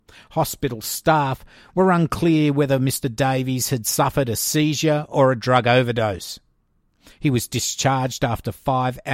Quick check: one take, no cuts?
yes; 0 cuts

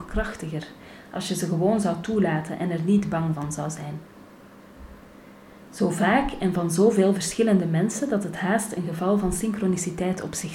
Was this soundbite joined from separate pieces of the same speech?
no; 0 cuts

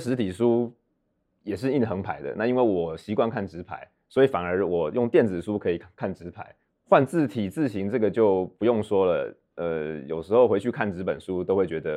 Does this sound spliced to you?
no; 0 cuts

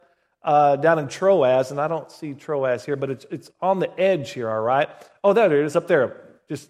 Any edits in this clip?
no; 0 cuts

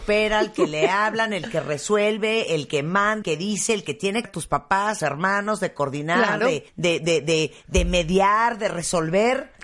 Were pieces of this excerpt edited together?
yes; 4 cuts; at 3.2 s, 4.2 s, 5.0 s, 6.7 s

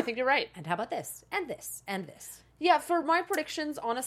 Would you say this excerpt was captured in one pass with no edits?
yes; 0 cuts

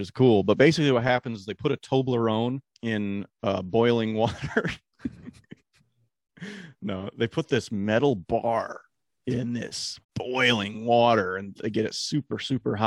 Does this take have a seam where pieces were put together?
yes; 3 cuts; at 2.6 s, 9.1 s, 10.0 s

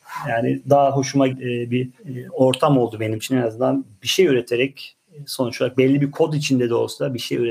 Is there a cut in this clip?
yes; 2 cuts; at 1.3 s, 2.0 s

